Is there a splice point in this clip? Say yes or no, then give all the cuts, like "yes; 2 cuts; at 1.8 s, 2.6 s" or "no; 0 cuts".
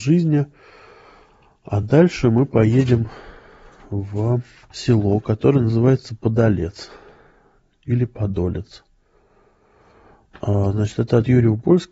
no; 0 cuts